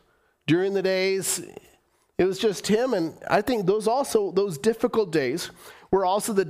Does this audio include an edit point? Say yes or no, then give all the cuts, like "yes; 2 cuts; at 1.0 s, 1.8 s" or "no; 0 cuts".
no; 0 cuts